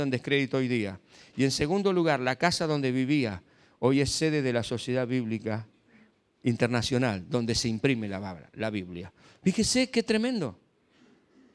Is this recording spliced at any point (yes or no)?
no